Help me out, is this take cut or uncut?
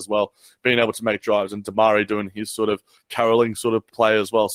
uncut